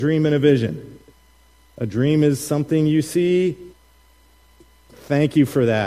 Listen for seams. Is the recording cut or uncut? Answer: uncut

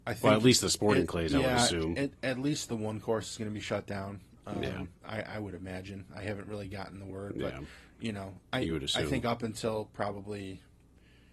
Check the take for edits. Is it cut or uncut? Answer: uncut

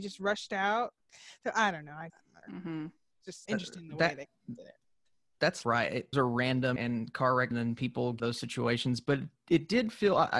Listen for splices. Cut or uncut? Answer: cut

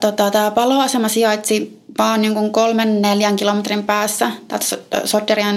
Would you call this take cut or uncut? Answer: uncut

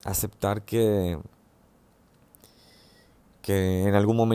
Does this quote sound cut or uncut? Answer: uncut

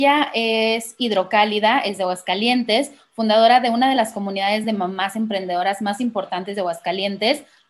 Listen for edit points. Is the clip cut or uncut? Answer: uncut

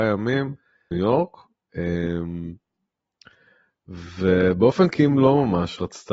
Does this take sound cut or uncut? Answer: cut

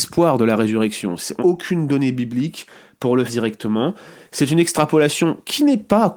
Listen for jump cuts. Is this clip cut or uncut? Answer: cut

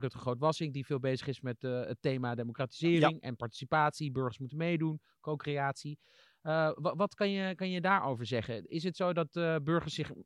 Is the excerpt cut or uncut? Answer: uncut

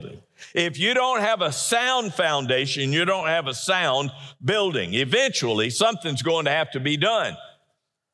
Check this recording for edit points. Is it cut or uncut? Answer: uncut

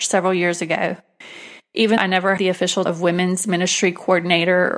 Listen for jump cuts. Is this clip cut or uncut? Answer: cut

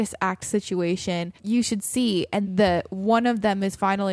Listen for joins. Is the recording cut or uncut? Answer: cut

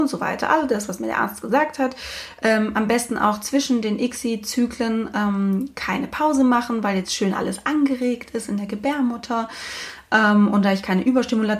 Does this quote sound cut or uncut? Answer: uncut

